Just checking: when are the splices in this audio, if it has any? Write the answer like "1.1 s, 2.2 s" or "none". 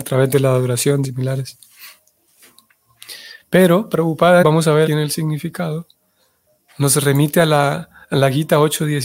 1.0 s, 4.4 s, 4.9 s